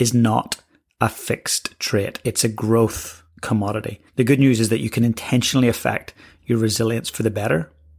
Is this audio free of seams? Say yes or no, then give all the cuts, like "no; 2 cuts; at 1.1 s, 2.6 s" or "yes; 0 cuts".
no; 1 cut; at 4.1 s